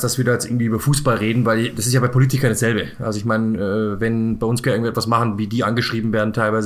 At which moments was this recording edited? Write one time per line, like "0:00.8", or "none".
0:04.6